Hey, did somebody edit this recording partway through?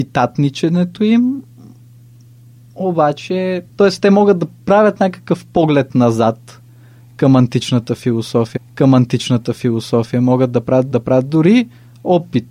yes; 3 cuts; at 3.7 s, 8.6 s, 10.9 s

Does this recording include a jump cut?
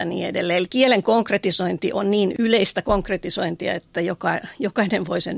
no; 0 cuts

